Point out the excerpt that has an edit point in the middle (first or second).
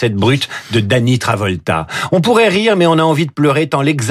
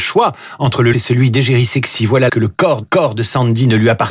second